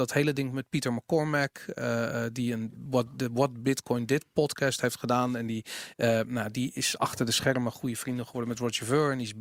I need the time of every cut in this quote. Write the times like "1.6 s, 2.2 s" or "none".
none